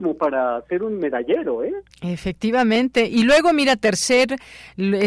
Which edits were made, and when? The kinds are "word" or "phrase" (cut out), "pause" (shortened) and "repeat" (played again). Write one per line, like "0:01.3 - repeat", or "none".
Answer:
0:01.9 - pause